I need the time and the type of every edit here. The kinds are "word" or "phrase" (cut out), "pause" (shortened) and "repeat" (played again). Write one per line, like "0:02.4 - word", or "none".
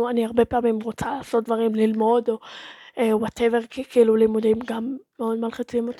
none